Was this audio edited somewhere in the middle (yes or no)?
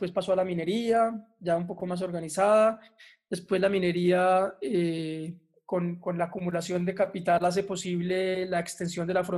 no